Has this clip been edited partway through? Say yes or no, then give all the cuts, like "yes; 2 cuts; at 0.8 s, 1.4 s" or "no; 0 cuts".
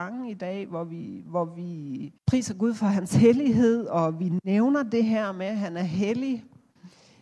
yes; 1 cut; at 2.2 s